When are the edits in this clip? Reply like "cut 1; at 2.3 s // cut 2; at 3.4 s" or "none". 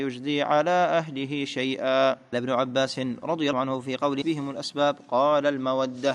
cut 1; at 2.3 s // cut 2; at 3.5 s // cut 3; at 4.2 s

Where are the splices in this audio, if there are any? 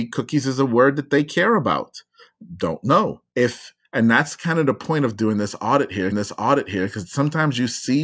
cut 1; at 3.3 s // cut 2; at 6.1 s

